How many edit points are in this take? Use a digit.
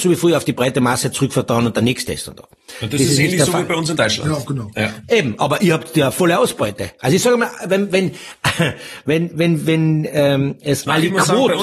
0